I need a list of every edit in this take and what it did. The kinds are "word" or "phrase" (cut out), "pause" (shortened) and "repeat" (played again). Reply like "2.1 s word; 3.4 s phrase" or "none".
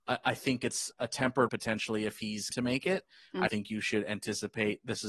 0.9 s word; 1.5 s word; 2.5 s word; 3.5 s word